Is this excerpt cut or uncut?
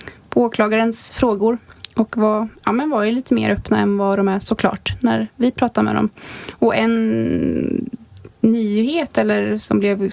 uncut